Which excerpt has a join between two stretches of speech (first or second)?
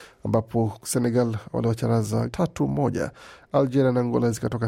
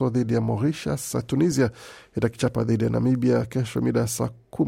first